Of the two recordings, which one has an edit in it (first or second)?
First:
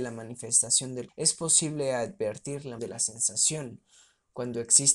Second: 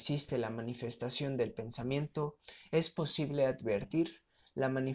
first